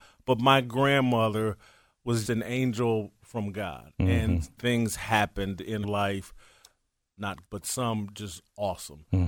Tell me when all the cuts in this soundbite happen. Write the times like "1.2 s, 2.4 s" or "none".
2.2 s, 4.6 s, 5.8 s, 7.5 s